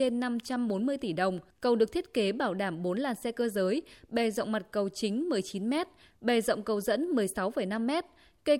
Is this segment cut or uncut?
cut